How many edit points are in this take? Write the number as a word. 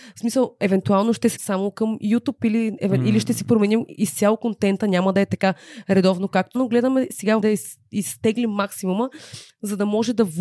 four